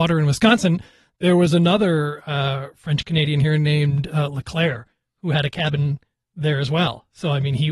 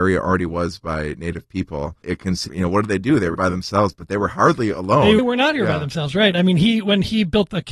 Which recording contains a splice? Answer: second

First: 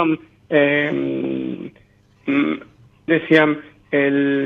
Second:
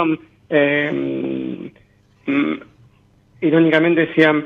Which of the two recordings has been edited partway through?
first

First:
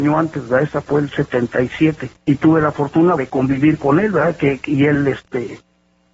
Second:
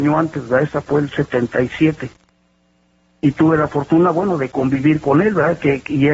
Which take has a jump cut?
first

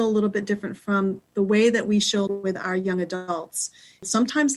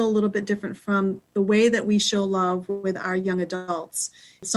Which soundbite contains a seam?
first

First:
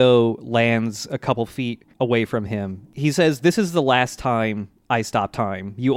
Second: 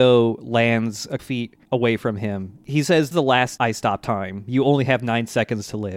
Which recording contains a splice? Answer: second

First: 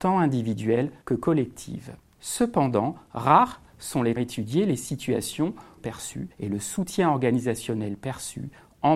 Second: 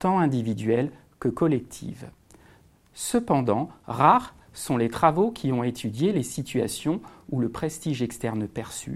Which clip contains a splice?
first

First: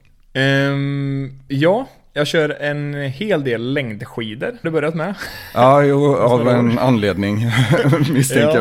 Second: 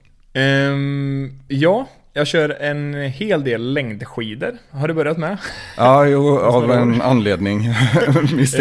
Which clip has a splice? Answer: first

